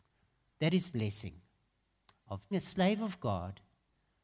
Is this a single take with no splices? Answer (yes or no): no